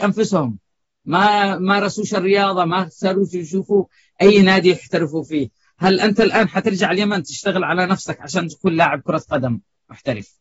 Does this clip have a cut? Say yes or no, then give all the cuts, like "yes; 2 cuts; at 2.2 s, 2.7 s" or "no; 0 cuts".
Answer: no; 0 cuts